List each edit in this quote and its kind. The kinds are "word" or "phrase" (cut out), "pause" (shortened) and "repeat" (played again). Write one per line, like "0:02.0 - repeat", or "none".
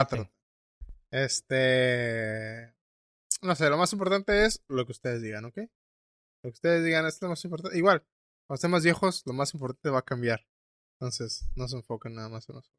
none